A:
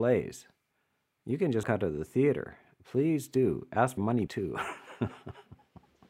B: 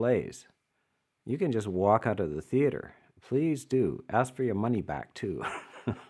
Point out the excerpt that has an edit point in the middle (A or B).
A